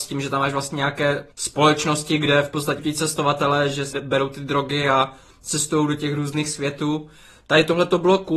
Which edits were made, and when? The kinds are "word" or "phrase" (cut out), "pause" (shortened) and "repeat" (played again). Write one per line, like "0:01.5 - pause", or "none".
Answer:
0:01.3 - pause
0:02.8 - word
0:03.9 - word